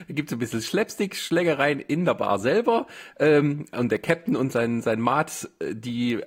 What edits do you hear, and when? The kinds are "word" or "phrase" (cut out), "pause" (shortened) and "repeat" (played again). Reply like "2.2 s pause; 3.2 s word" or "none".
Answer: none